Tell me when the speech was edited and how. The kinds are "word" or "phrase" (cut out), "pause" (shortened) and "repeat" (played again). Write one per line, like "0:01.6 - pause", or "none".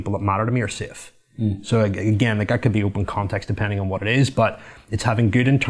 none